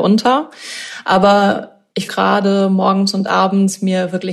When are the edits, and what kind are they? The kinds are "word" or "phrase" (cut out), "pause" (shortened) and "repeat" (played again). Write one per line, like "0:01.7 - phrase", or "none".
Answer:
0:02.1 - word